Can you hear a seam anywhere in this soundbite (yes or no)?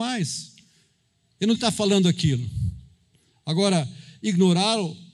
yes